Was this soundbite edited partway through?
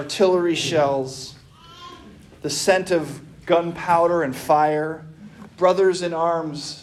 no; 0 cuts

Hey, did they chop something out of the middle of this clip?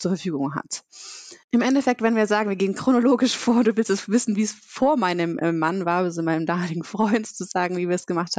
yes; 1 cut; at 1.4 s

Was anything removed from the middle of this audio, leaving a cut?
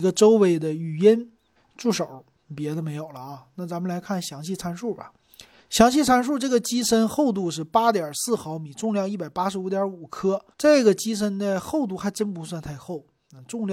yes; 3 cuts; at 1.6 s, 5.6 s, 10.5 s

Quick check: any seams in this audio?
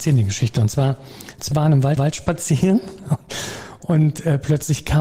yes; 2 cuts; at 1.5 s, 2.0 s

